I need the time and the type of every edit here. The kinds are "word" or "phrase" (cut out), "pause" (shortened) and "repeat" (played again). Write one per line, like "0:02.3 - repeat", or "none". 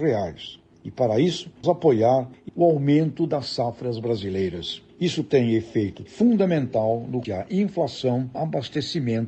0:01.6 - word
0:02.5 - word
0:04.9 - pause
0:06.1 - word
0:07.2 - word
0:08.3 - phrase

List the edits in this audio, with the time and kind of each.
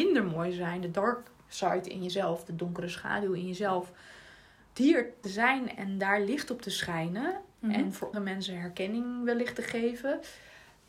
0:05.2 - phrase
0:08.1 - word

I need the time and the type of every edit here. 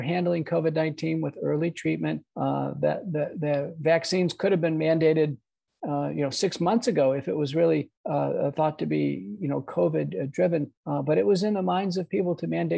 0:02.3 - pause
0:08.0 - pause
0:10.8 - pause

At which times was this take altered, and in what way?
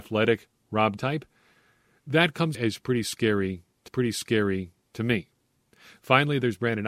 0:01.0 - word
0:02.5 - word
0:03.9 - repeat

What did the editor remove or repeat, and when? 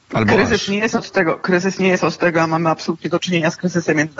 none

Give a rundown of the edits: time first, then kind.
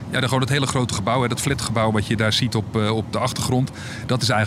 none

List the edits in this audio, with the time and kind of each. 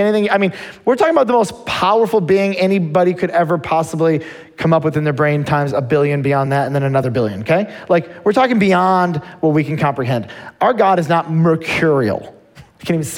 none

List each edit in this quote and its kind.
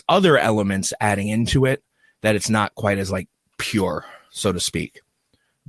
none

